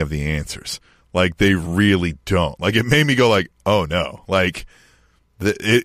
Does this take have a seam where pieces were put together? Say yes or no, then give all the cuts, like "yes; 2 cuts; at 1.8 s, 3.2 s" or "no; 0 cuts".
no; 0 cuts